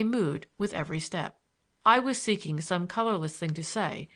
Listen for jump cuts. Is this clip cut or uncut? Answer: uncut